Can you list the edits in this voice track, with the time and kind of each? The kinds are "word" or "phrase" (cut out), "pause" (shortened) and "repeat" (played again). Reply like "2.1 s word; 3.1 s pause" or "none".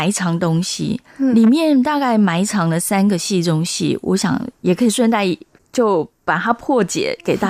none

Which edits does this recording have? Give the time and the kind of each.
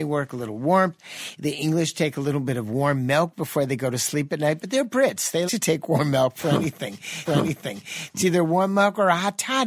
5.5 s word; 7.2 s repeat

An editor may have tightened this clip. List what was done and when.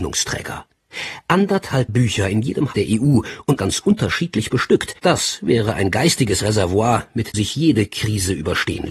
1.9 s word; 2.7 s word; 3.6 s word; 5.0 s pause; 7.3 s word

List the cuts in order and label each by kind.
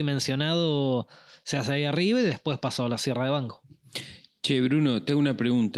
none

